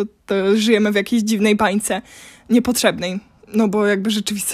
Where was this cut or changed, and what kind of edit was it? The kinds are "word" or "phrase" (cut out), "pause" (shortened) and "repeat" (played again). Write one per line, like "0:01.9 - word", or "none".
none